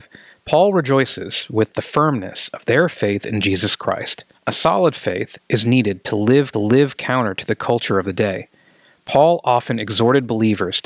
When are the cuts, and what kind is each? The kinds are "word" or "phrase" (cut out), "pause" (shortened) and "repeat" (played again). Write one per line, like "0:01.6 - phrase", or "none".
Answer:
0:04.3 - pause
0:06.5 - repeat